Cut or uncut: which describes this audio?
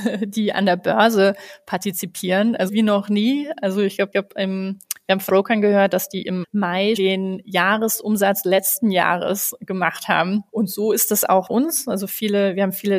cut